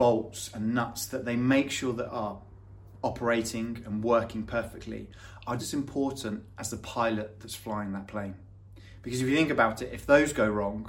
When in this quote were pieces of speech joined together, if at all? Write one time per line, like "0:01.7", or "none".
0:02.1
0:05.6